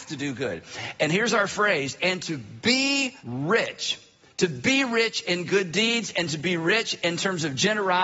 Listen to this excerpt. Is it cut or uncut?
cut